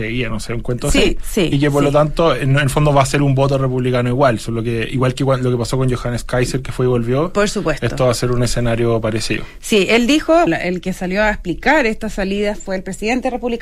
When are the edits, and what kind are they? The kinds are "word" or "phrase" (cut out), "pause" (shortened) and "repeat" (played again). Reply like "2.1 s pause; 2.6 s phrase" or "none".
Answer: 10.5 s word